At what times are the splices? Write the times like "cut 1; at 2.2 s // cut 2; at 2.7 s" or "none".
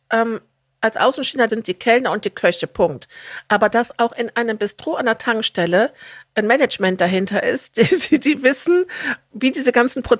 cut 1; at 1.5 s